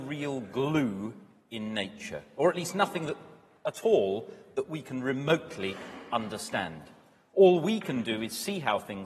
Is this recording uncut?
yes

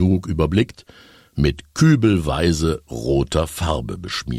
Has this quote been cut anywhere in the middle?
no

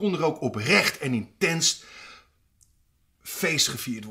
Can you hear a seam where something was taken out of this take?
no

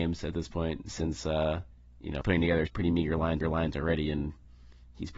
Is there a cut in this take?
yes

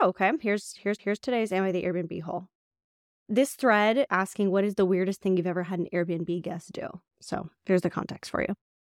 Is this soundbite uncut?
no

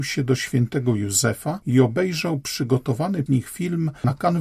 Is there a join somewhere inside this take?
yes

